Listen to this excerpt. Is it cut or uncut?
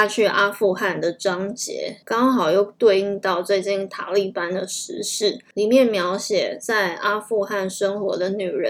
cut